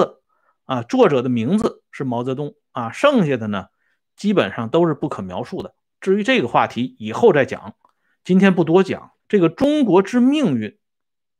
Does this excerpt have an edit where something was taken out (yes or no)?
yes